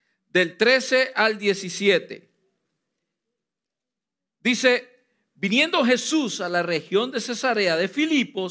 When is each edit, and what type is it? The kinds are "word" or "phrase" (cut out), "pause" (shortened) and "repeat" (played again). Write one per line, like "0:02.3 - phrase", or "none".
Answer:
none